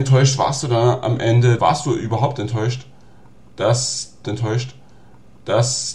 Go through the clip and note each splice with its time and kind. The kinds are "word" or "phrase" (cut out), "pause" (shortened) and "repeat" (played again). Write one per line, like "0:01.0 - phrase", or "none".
0:01.6 - phrase
0:04.2 - repeat